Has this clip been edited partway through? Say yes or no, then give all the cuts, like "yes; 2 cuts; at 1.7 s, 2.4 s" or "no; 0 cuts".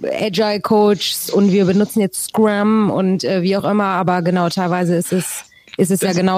no; 0 cuts